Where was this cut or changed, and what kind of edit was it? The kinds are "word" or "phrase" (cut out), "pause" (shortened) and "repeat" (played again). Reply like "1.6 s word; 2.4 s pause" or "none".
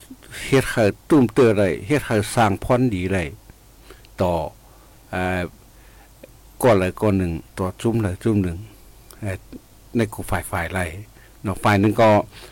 7.5 s pause